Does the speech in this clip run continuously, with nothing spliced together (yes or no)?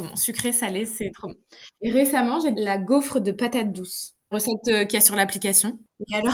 no